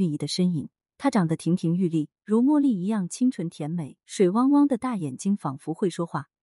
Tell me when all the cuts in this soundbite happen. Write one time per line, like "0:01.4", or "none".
0:02.2
0:04.0